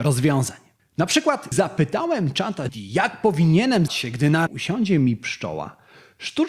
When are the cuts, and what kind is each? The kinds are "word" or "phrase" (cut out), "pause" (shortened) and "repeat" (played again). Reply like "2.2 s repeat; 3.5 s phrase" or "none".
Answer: 1.5 s word; 2.7 s word; 3.9 s word; 4.5 s word